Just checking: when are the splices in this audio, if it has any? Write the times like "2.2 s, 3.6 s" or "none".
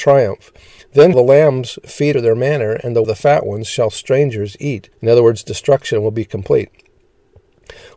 1.1 s, 2.1 s, 3.0 s, 4.9 s

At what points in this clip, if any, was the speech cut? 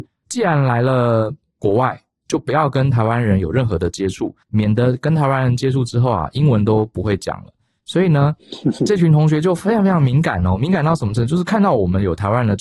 4.4 s

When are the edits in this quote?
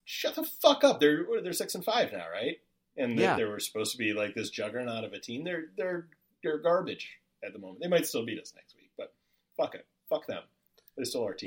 none

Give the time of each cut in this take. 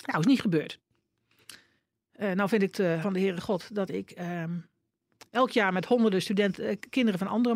3.0 s

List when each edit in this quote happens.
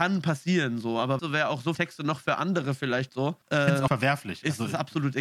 1.2 s, 1.7 s, 3.1 s, 3.4 s, 3.9 s

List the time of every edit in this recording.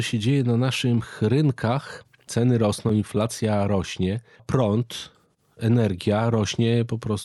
4.4 s

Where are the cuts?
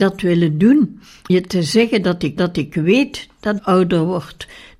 1.3 s, 2.4 s, 3.6 s

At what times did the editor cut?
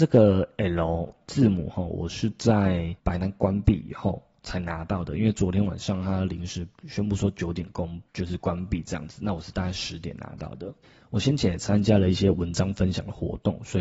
3.0 s, 8.1 s, 10.8 s

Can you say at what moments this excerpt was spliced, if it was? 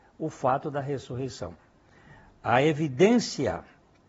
none

